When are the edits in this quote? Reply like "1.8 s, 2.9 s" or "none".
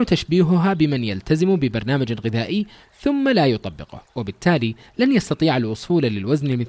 none